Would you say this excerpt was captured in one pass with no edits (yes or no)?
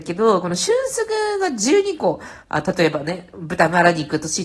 no